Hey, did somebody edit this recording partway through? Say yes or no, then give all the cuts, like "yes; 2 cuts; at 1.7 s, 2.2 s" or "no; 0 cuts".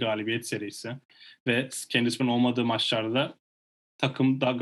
yes; 1 cut; at 2.2 s